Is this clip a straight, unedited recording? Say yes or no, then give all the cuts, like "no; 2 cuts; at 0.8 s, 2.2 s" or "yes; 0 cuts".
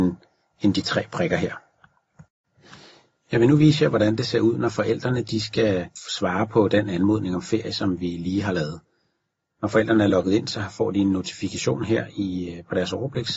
yes; 0 cuts